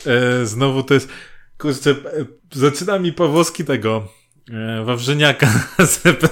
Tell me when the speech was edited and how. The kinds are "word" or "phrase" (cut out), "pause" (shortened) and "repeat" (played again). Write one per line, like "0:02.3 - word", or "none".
0:02.4 - pause
0:03.7 - phrase